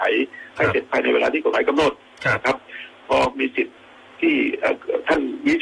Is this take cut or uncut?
uncut